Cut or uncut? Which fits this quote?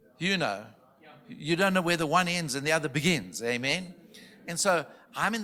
uncut